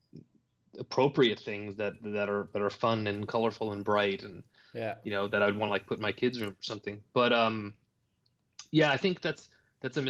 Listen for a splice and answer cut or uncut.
uncut